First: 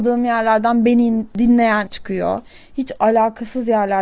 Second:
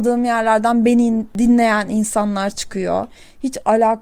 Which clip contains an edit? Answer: first; 1 cut; at 1.9 s

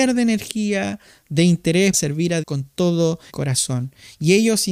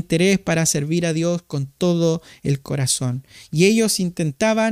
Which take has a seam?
first; 3 cuts; at 1.9 s, 2.4 s, 3.3 s

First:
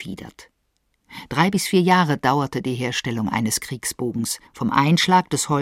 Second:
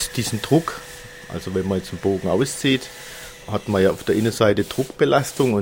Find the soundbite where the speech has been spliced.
first; 1 cut; at 4.5 s

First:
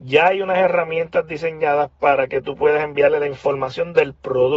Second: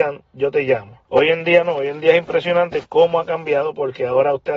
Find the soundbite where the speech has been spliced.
second; 1 cut; at 1.0 s

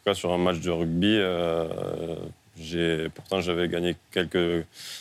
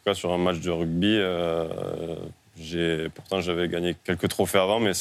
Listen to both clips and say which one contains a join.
second; 1 cut; at 4.0 s

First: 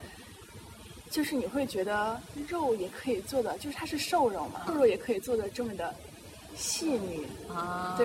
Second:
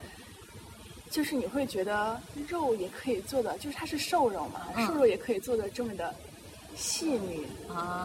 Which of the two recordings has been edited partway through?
first; 1 cut; at 4.7 s

